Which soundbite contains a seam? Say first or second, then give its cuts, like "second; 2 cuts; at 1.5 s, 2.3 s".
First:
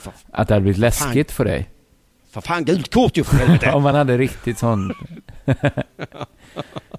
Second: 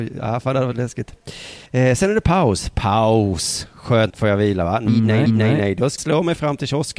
second; 5 cuts; at 1.7 s, 4.1 s, 4.9 s, 5.3 s, 6.0 s